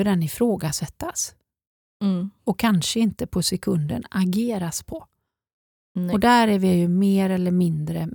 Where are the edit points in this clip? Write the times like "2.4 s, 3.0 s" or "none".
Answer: none